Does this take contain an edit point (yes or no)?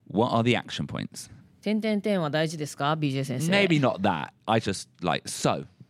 yes